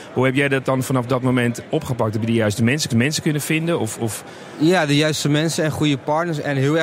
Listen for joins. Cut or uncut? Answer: cut